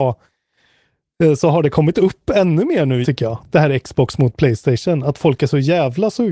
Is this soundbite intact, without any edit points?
no; 1 cut; at 3.0 s

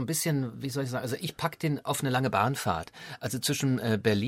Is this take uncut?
yes; 0 cuts

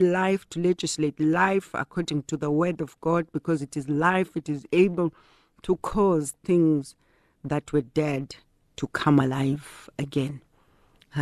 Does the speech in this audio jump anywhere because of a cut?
no; 0 cuts

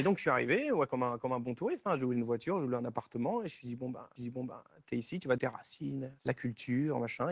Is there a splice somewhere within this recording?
yes; 3 cuts; at 4.2 s, 5.4 s, 6.2 s

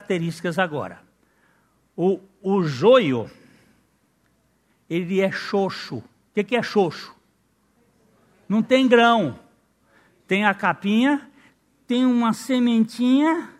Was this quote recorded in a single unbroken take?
yes; 0 cuts

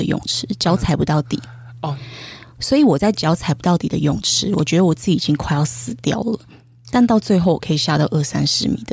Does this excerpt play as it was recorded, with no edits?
yes; 0 cuts

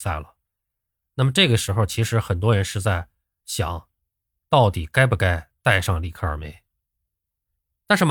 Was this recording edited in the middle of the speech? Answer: no; 0 cuts

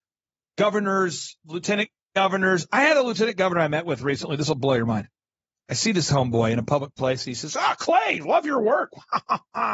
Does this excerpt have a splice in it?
no; 0 cuts

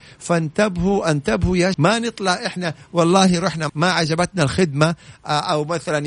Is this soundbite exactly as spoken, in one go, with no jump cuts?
no; 2 cuts; at 1.7 s, 3.7 s

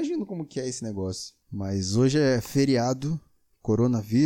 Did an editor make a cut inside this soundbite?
yes; 1 cut; at 1.4 s

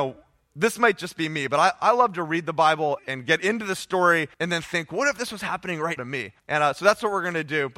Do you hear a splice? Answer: yes; 4 cuts; at 3.0 s, 4.3 s, 6.0 s, 6.4 s

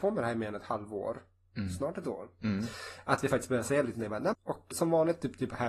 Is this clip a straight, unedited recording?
no; 2 cuts; at 4.3 s, 4.7 s

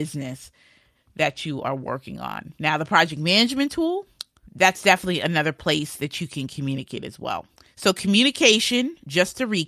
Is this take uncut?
yes; 0 cuts

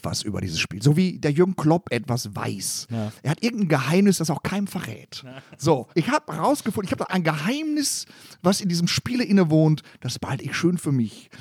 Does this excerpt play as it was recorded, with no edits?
no; 2 cuts; at 5.9 s, 7.1 s

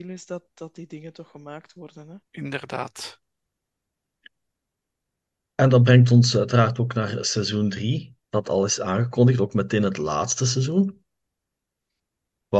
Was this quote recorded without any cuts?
no; 2 cuts; at 2.3 s, 8.2 s

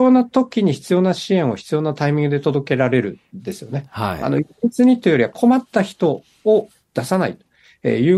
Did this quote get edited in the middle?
no; 0 cuts

